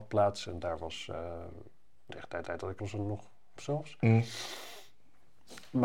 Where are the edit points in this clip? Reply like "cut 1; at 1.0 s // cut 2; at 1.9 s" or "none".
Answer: cut 1; at 2.1 s // cut 2; at 2.4 s // cut 3; at 2.8 s // cut 4; at 3.6 s